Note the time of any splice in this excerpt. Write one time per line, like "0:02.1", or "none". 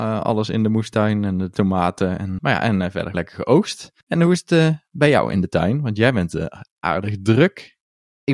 0:02.4
0:03.1
0:04.0